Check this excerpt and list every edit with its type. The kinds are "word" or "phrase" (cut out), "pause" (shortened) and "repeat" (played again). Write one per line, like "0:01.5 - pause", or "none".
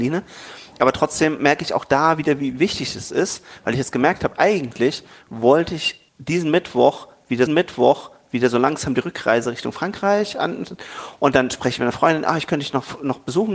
0:06.1 - pause
0:07.5 - repeat

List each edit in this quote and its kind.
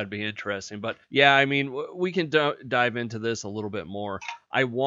0:01.0 - pause

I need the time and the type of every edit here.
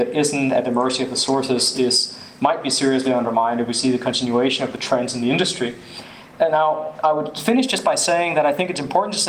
none

